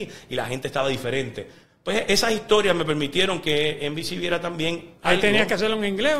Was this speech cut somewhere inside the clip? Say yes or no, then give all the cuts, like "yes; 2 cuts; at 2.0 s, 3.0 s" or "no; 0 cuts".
no; 0 cuts